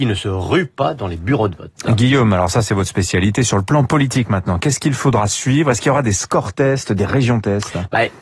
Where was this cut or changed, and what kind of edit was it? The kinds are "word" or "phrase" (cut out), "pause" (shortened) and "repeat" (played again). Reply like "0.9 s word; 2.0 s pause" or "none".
none